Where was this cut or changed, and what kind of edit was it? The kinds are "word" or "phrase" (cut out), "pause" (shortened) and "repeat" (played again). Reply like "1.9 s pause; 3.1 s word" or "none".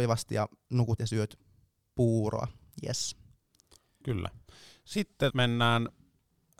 1.0 s word; 5.3 s word